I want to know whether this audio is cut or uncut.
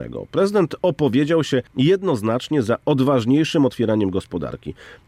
cut